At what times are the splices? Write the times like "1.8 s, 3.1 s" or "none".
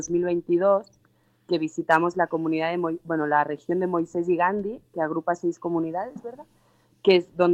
none